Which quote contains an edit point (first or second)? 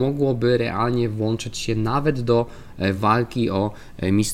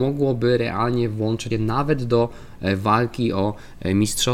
second